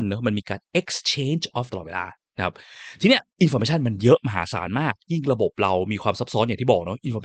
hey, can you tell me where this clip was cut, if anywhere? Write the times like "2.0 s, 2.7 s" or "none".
1.7 s, 3.3 s